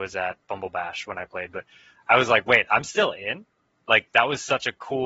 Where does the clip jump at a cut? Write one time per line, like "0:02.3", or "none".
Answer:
none